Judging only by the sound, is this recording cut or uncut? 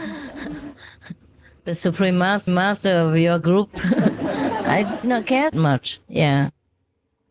cut